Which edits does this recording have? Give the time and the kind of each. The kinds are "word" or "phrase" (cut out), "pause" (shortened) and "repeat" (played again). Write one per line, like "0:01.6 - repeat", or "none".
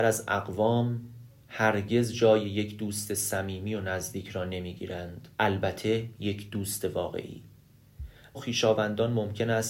0:05.3 - pause
0:08.3 - word